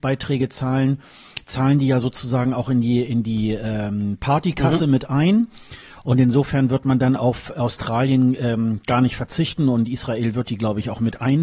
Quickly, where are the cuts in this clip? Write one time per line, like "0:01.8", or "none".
none

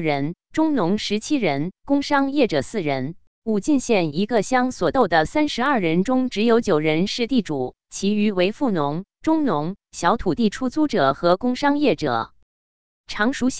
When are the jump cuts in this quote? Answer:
0:01.8
0:03.3

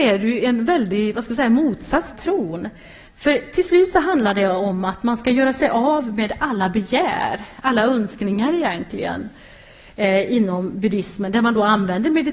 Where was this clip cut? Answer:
0:02.1

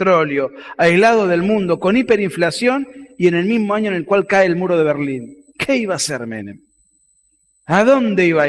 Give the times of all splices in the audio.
0:05.5

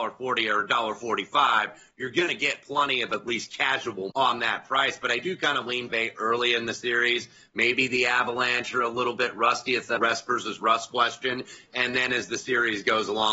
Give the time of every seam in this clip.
0:04.1
0:05.9
0:10.0

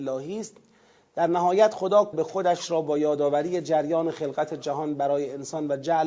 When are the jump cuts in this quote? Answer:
0:02.1

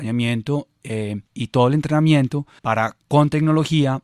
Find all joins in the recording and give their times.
0:01.3
0:02.6

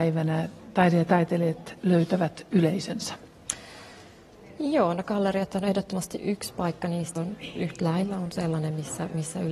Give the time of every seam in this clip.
0:06.2
0:07.2

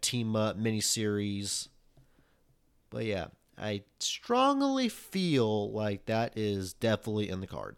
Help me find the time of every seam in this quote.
none

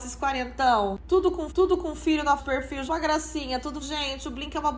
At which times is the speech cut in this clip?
0:01.5
0:02.4
0:02.9
0:03.8

